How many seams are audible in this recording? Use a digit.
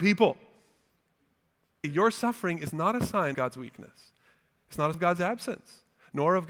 3